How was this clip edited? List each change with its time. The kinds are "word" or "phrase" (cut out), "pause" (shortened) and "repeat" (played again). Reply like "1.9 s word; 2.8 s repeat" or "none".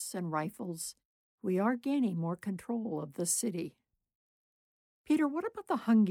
none